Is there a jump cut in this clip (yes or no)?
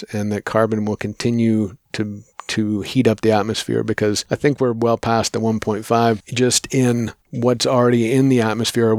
no